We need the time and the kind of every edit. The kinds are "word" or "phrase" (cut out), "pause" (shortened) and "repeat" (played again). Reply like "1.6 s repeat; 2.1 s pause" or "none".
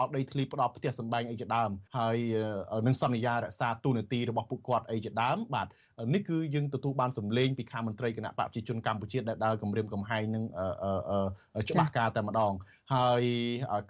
1.9 s pause